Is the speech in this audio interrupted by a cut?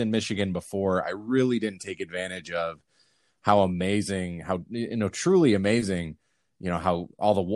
no; 0 cuts

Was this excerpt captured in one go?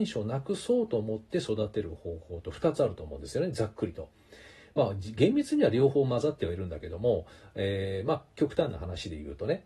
yes; 0 cuts

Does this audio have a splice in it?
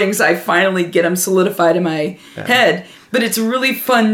no; 0 cuts

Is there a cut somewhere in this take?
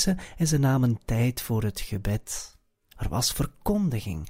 no; 0 cuts

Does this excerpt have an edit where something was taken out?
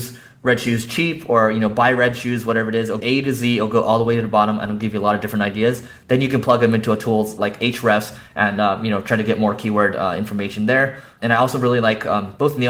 yes; 1 cut; at 3.0 s

